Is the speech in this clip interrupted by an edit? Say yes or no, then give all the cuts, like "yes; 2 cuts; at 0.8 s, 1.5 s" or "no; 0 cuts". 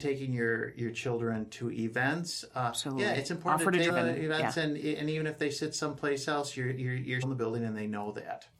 yes; 2 cuts; at 3.9 s, 7.2 s